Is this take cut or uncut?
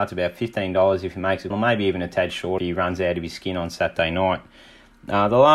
cut